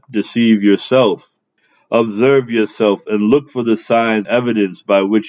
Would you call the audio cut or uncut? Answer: cut